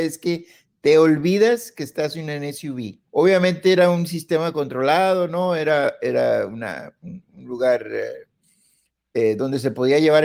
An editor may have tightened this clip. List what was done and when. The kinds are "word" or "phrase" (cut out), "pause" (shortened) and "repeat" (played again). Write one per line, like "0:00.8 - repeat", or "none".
0:03.1 - pause